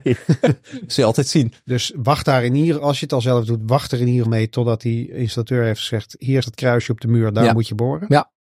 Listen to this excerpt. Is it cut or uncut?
cut